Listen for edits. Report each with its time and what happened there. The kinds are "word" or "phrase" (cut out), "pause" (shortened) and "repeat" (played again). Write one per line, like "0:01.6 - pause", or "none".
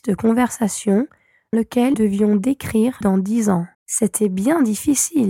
0:01.5 - word
0:01.9 - word
0:03.0 - phrase
0:03.7 - pause